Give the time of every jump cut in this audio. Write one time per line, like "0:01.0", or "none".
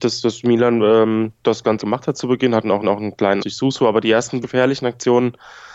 0:01.4
0:01.8
0:02.8
0:03.4
0:04.4

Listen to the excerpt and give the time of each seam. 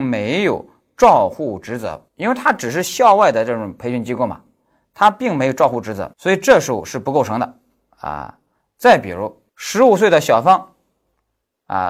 0:02.1
0:06.1
0:09.5

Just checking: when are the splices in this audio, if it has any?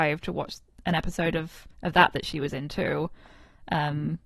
0:01.7

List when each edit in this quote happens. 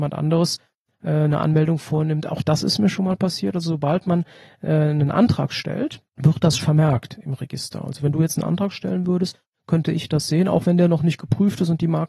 0:06.6

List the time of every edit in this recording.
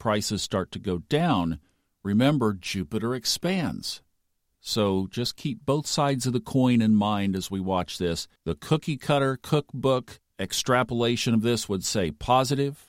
0:08.4

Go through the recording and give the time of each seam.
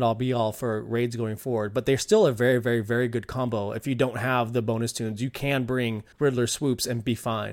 0:06.1

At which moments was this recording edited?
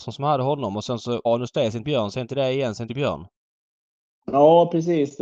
0:01.3
0:01.8
0:02.9

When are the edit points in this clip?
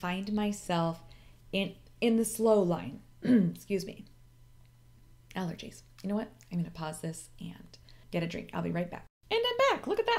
0:08.0

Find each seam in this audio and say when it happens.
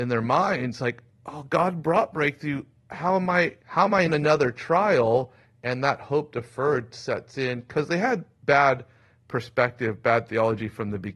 0:03.6
0:04.1
0:06.9

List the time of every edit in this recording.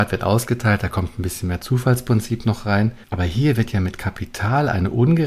0:03.0

